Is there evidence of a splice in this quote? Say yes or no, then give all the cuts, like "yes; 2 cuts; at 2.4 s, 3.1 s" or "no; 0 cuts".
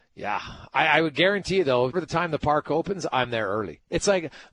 yes; 1 cut; at 1.9 s